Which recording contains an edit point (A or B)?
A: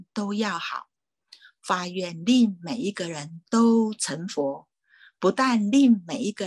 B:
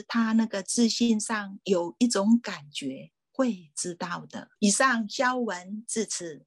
B